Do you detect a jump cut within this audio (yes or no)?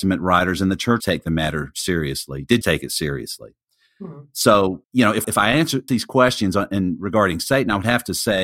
yes